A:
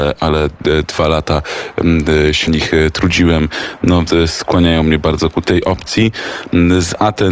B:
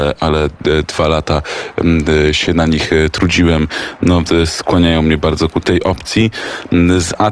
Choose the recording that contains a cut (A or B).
A